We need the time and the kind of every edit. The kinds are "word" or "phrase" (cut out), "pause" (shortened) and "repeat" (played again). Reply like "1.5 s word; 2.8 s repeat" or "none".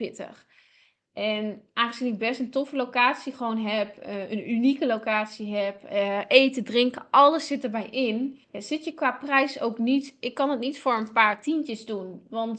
8.4 s pause